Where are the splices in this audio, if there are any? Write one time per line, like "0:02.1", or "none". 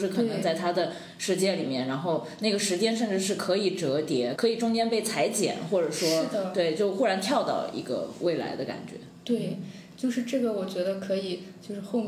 0:04.4